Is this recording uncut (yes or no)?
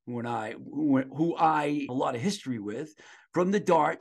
no